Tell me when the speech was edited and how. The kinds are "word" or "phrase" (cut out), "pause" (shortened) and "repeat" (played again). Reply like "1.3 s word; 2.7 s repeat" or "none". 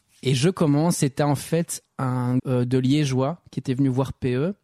2.4 s word